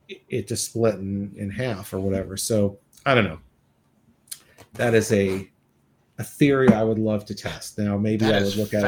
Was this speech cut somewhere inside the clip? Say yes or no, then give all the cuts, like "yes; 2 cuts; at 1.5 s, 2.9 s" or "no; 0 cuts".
no; 0 cuts